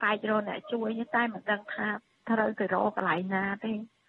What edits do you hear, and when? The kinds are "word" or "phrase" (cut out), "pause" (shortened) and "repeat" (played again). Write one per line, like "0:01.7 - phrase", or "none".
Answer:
none